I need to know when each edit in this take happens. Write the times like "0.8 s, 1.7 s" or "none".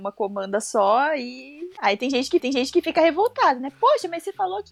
2.4 s